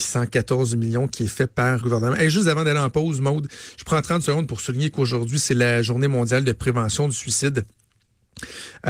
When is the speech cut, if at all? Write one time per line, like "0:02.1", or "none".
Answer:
0:01.8